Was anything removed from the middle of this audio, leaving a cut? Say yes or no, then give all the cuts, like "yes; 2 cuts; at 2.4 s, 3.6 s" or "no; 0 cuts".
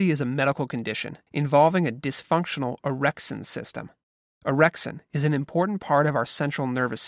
no; 0 cuts